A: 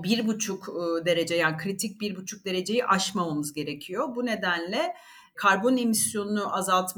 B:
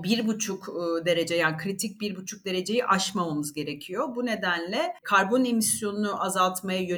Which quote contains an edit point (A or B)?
B